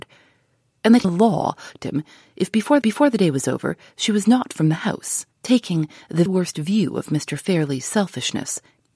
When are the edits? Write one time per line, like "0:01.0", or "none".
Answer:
0:01.0
0:01.8
0:02.8
0:04.5
0:05.3
0:06.3